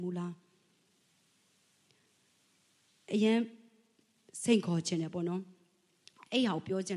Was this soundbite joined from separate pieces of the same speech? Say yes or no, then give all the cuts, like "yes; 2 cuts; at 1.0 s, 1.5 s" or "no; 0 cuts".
no; 0 cuts